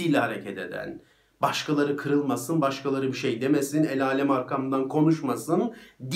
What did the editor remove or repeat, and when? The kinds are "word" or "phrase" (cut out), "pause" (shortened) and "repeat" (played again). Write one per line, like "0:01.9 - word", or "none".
none

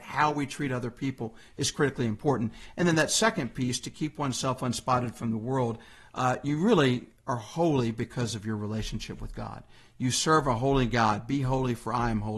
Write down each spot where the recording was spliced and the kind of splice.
none

